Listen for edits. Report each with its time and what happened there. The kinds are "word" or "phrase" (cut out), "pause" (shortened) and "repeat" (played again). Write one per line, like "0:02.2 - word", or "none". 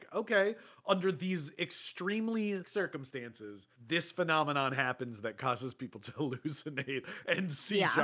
0:02.6 - word
0:03.8 - pause